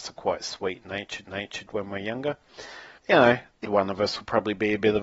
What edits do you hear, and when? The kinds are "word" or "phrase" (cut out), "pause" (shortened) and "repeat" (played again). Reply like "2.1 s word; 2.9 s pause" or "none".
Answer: 1.2 s repeat; 3.0 s pause; 3.6 s word